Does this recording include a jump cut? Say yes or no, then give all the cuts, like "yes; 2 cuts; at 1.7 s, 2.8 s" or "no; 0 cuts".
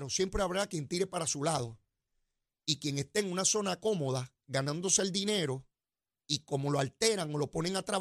no; 0 cuts